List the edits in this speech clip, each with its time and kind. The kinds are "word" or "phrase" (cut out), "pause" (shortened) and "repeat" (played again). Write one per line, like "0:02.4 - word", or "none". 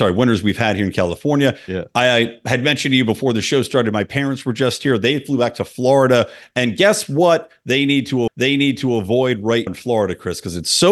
0:08.3 - repeat
0:09.7 - word